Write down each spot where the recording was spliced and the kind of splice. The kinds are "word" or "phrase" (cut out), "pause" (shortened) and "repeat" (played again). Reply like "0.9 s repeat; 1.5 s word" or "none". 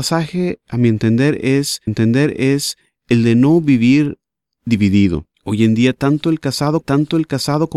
1.9 s repeat; 5.3 s pause; 6.8 s repeat